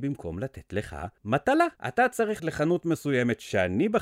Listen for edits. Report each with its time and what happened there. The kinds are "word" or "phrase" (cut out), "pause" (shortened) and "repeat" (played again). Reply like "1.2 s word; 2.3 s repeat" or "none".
1.8 s pause; 2.4 s word